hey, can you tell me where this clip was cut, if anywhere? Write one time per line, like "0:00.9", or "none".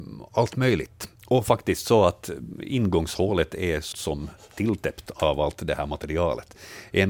0:01.1
0:03.9